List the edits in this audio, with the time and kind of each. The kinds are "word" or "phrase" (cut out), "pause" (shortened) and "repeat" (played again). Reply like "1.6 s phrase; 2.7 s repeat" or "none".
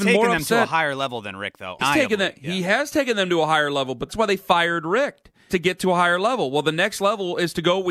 1.8 s word; 4.1 s word; 5.5 s word